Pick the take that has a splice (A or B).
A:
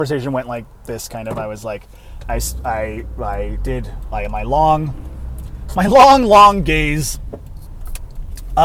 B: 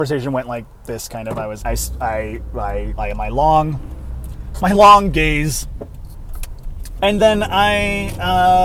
B